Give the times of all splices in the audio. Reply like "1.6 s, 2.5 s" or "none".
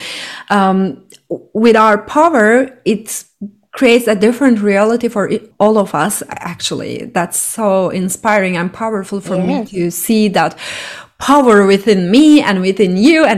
none